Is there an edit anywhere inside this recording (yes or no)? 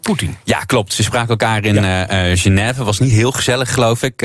no